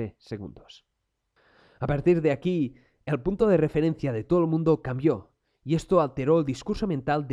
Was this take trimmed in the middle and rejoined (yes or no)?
no